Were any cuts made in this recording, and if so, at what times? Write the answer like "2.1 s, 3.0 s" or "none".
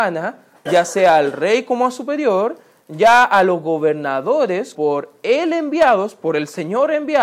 4.7 s